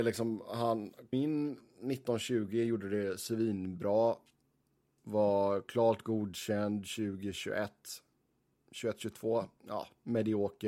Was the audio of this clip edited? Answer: yes; 1 cut; at 1.1 s

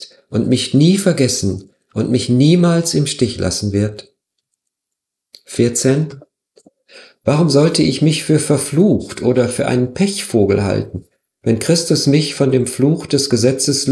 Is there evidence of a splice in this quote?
no; 0 cuts

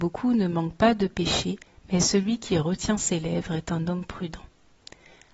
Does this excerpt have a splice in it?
no; 0 cuts

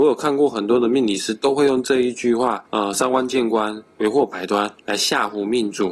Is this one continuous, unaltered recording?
no; 2 cuts; at 2.7 s, 4.8 s

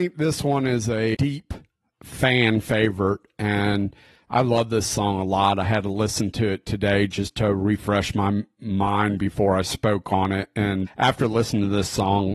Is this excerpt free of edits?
no; 2 cuts; at 1.1 s, 10.9 s

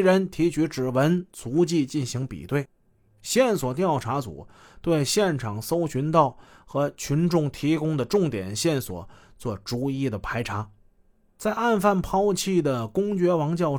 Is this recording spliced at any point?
no; 0 cuts

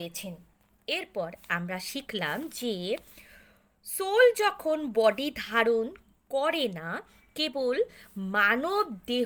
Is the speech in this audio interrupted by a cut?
no; 0 cuts

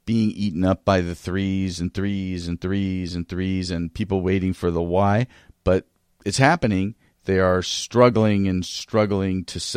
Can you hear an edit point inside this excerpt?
no; 0 cuts

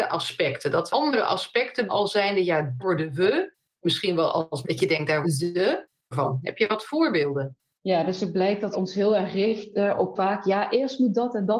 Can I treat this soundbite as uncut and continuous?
no; 8 cuts; at 0.9 s, 1.9 s, 2.8 s, 4.6 s, 5.2 s, 6.1 s, 8.7 s, 10.2 s

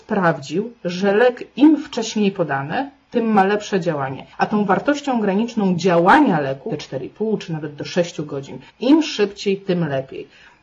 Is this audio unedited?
no; 3 cuts; at 4.3 s, 6.7 s, 8.7 s

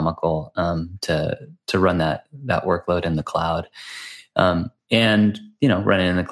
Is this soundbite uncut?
yes; 0 cuts

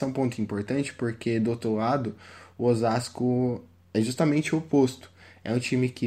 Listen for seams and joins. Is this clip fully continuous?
yes; 0 cuts

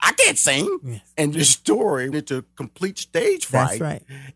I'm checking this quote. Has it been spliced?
yes; 2 cuts; at 1.3 s, 2.1 s

